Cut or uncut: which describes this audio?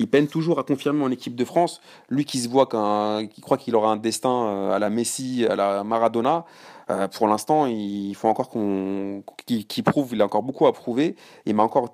uncut